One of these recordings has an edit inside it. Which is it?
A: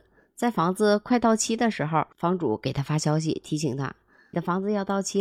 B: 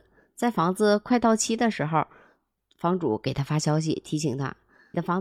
A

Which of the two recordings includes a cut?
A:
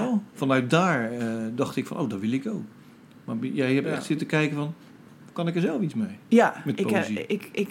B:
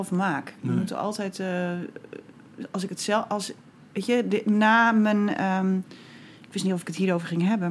B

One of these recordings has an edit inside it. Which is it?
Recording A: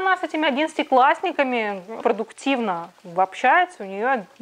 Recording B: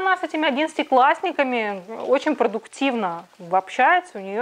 A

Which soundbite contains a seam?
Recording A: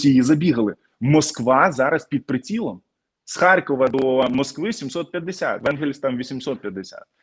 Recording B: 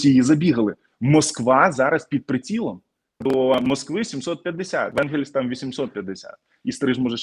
B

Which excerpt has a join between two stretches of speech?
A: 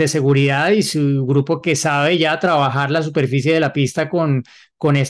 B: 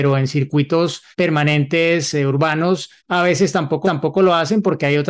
B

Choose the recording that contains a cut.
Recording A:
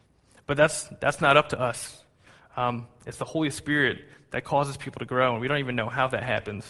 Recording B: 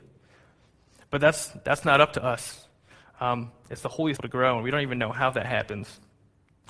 B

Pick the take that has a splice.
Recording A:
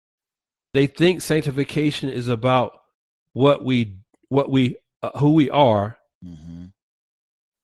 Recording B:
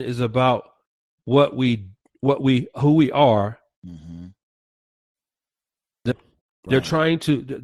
B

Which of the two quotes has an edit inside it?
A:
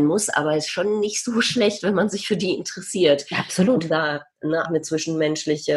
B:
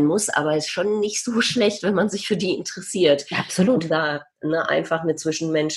A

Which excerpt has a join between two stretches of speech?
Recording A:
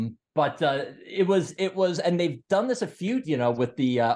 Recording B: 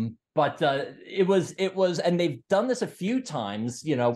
A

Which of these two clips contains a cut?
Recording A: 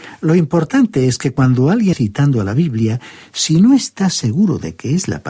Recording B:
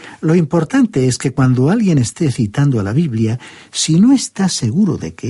A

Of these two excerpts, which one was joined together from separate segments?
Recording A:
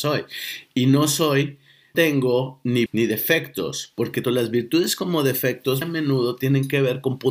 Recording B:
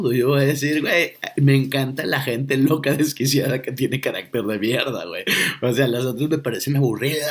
A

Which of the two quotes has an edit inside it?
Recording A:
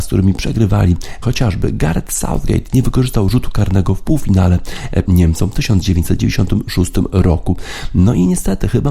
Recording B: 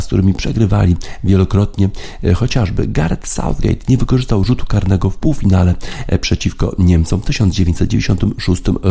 A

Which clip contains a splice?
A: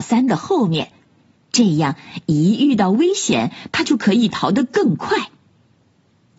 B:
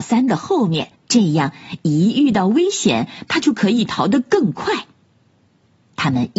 B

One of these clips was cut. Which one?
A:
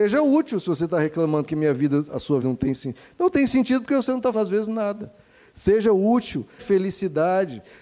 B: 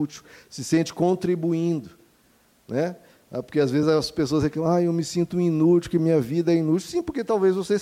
A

